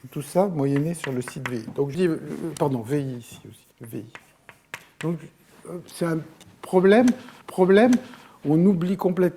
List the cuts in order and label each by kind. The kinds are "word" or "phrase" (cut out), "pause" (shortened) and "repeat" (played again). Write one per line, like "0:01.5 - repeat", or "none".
0:01.9 - word
0:03.7 - pause
0:07.4 - repeat